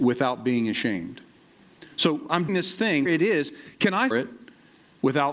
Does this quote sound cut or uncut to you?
cut